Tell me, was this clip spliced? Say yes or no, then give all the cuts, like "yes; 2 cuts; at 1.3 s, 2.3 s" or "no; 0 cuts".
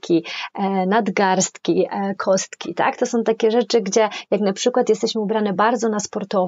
no; 0 cuts